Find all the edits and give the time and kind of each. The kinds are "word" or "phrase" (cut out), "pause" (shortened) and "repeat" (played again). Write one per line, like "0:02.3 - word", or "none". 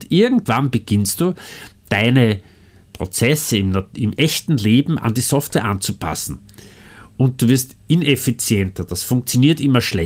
none